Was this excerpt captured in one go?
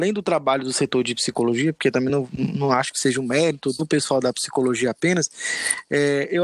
yes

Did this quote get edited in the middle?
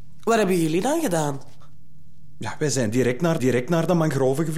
yes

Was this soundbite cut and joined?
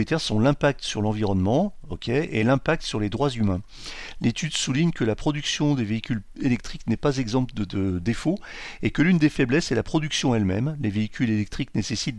no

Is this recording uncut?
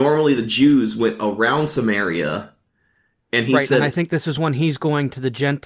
yes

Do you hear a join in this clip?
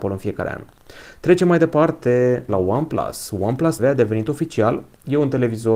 yes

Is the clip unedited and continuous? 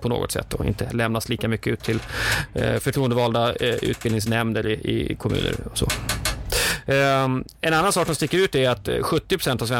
yes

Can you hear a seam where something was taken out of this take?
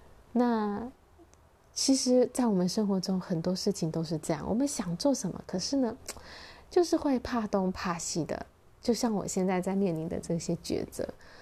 no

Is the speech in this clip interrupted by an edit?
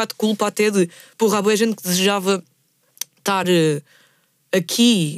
no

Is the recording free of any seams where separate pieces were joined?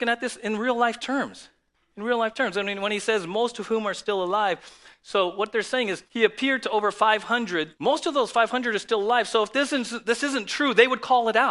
no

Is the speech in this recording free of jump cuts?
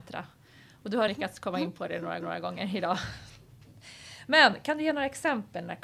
no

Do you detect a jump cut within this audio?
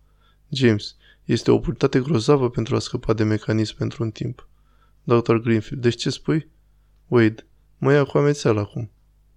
no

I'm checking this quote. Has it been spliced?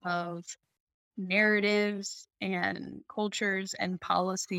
no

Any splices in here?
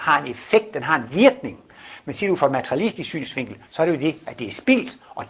no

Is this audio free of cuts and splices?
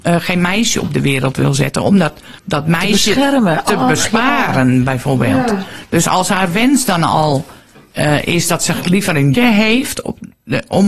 no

